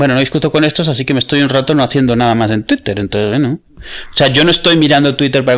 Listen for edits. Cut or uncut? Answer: uncut